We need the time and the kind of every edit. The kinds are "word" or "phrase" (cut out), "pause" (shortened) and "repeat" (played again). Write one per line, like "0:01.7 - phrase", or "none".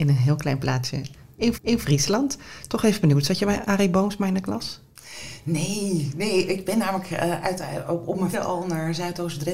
0:01.5 - repeat
0:08.3 - word